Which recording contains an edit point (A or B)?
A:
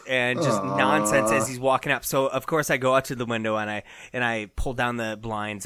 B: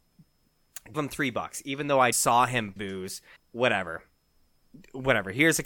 B